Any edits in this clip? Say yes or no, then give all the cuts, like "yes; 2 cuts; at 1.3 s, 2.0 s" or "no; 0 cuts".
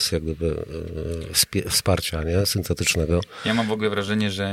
no; 0 cuts